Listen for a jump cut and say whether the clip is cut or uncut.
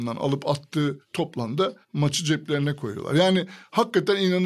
uncut